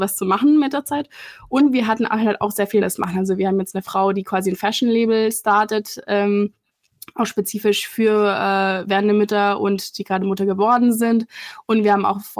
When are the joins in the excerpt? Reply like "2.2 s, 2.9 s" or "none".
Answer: 2.8 s